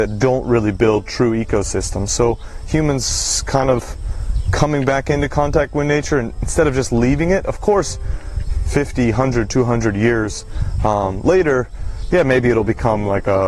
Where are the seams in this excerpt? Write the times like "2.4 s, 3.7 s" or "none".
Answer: none

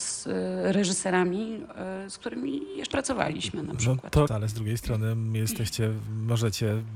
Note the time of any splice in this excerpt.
2.9 s, 4.3 s

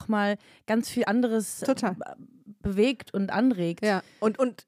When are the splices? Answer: none

